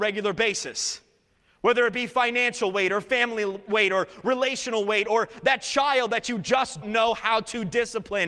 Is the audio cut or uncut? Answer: cut